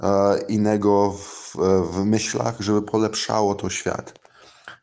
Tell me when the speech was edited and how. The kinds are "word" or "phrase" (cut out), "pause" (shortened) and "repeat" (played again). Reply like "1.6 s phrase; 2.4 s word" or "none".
none